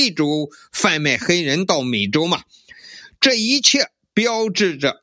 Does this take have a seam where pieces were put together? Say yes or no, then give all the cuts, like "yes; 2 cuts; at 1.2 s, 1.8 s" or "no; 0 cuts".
no; 0 cuts